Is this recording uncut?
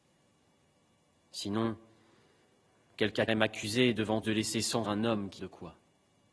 no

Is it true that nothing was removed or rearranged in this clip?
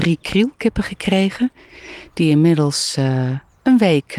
yes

